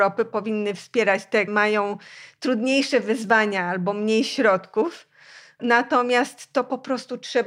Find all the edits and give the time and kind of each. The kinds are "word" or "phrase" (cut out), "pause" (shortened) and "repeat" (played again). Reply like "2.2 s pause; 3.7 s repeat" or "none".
1.5 s word